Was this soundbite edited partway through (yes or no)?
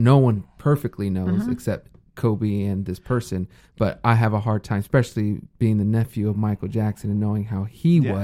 no